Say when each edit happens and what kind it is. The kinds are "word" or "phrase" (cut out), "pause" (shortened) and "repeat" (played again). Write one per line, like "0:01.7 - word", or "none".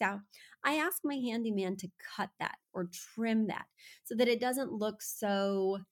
none